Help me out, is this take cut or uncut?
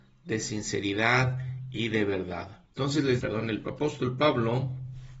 cut